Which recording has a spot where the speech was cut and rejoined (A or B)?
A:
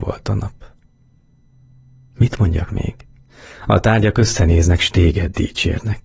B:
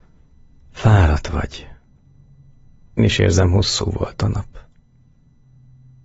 B